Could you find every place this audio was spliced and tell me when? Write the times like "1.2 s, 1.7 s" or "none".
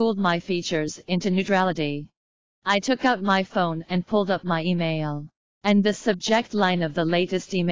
none